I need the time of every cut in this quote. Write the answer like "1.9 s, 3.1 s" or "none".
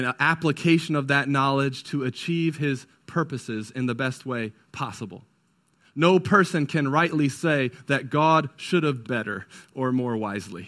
9.0 s